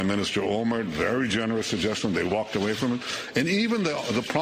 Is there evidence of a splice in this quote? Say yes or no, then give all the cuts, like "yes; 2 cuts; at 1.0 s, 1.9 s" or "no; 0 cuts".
no; 0 cuts